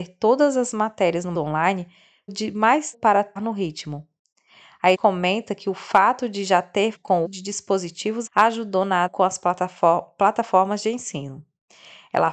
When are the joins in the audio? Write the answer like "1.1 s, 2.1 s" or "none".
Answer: 1.3 s, 2.3 s, 2.9 s, 3.4 s, 4.9 s, 6.9 s, 7.2 s, 8.3 s, 9.1 s